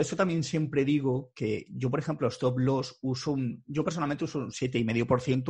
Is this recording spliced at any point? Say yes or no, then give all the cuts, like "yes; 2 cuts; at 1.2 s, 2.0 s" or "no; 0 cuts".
no; 0 cuts